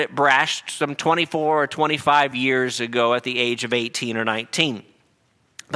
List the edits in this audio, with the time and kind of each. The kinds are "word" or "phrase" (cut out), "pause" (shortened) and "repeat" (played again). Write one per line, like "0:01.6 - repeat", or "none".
none